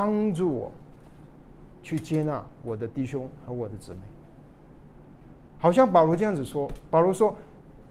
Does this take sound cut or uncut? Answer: uncut